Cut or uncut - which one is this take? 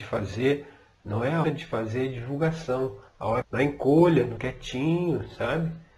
cut